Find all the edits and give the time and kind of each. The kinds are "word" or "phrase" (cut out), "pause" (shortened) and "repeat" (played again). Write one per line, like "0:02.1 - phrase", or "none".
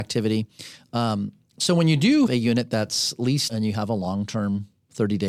0:02.3 - word
0:03.5 - word